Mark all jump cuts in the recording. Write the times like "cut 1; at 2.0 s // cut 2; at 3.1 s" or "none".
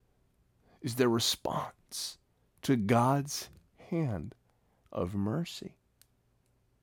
cut 1; at 2.4 s